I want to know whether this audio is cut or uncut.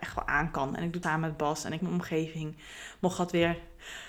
cut